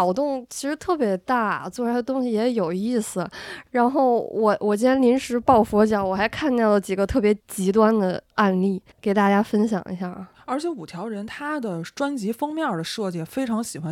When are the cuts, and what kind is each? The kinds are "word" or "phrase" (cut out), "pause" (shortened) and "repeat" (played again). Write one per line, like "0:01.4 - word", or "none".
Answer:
0:07.4 - pause
0:08.9 - pause